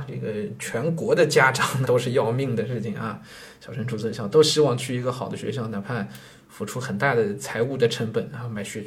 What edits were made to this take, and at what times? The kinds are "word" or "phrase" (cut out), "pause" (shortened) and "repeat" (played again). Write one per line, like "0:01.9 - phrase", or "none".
0:01.8 - word